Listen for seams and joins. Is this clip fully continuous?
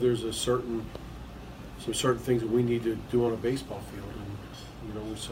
yes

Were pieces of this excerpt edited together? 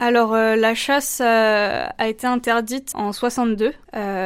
yes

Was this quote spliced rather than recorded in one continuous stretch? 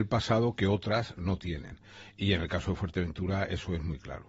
no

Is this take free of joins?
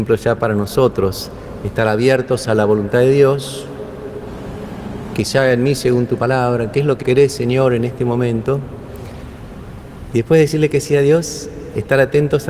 no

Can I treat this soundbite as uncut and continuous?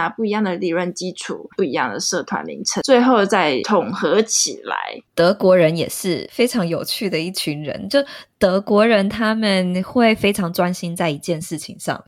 no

